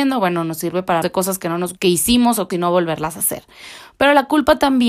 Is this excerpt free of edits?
no; 3 cuts; at 1.0 s, 1.8 s, 2.5 s

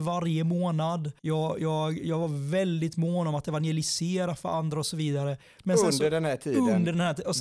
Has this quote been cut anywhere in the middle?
yes; 1 cut; at 1.2 s

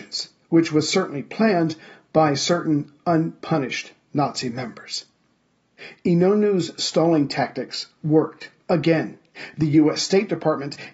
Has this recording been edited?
yes; 1 cut; at 8.6 s

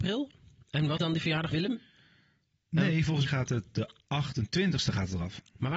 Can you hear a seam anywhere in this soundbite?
yes; 3 cuts; at 1.0 s, 1.5 s, 3.3 s

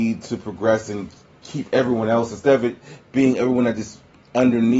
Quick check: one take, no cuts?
yes; 0 cuts

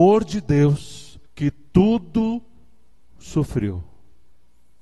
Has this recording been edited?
yes; 1 cut; at 1.3 s

